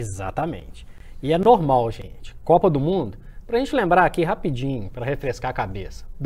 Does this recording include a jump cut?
no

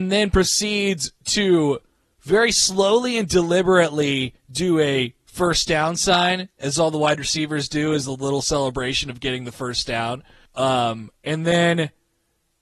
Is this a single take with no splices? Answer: no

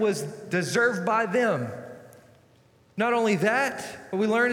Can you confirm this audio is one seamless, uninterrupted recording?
yes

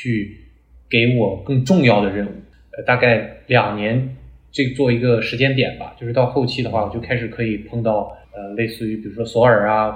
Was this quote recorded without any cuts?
no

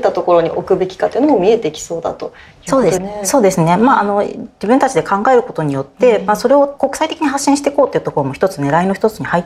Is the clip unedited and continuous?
no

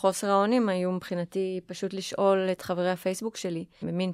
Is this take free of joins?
yes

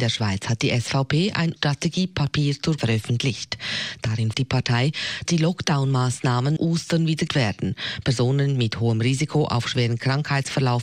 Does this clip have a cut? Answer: yes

